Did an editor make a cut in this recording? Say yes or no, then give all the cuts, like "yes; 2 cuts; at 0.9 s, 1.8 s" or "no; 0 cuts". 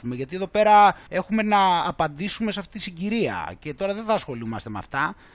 yes; 1 cut; at 1.1 s